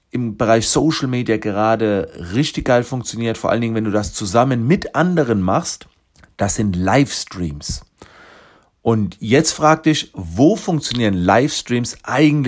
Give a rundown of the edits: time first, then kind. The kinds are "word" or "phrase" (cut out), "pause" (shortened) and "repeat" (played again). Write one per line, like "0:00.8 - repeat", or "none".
0:06.1 - pause